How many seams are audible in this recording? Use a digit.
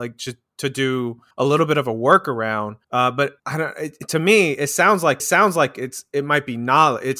4